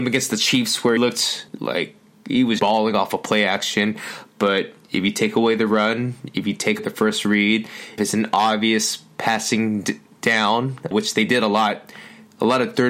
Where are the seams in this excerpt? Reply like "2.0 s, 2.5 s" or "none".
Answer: 1.0 s, 1.5 s, 2.6 s, 6.8 s, 8.0 s, 10.9 s

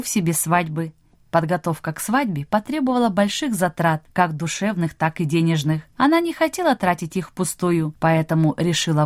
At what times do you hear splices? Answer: none

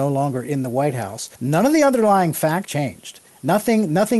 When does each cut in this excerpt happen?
1.3 s, 2.6 s

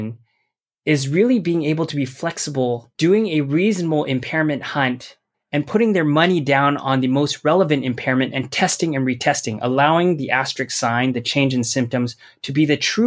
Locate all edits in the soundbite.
2.9 s, 5.3 s

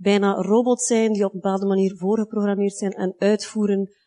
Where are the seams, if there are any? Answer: none

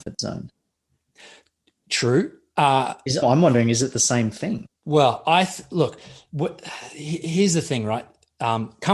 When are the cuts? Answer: 3.2 s, 4.8 s

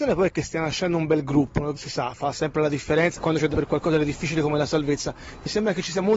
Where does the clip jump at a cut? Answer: 1.7 s, 3.2 s, 3.5 s

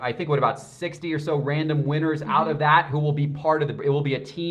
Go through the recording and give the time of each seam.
none

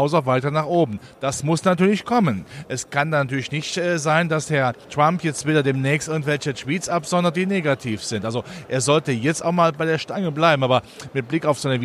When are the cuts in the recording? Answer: none

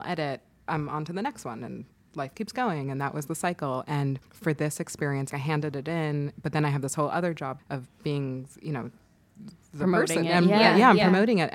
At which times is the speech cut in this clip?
2.3 s, 4.2 s, 5.3 s, 7.6 s

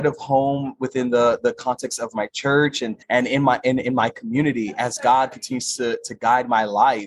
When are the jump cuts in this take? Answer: 3.0 s

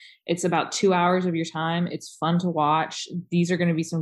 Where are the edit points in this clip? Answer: none

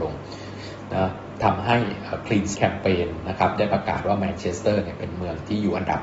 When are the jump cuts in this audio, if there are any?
2.5 s

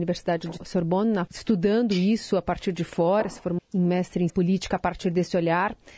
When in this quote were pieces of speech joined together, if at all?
1.3 s, 3.6 s, 4.3 s

